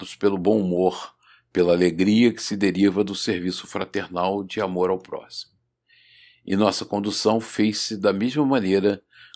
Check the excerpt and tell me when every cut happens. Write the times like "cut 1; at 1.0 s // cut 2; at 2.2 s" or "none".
none